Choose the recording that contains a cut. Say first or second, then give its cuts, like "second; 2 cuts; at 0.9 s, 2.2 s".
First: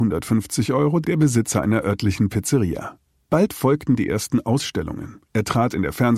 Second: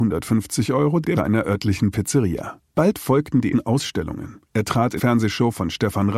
second; 4 cuts; at 1.2 s, 2.7 s, 3.5 s, 5.0 s